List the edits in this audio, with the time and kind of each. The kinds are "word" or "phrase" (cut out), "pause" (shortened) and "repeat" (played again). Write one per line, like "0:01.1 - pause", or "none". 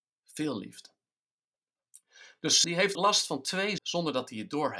0:02.6 - word
0:02.9 - word
0:03.8 - word